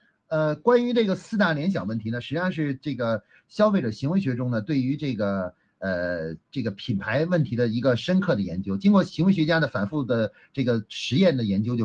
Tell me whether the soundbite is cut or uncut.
uncut